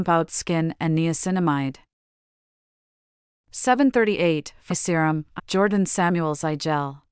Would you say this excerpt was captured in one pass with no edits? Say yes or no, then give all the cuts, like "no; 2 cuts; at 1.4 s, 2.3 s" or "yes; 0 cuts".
no; 2 cuts; at 4.7 s, 5.4 s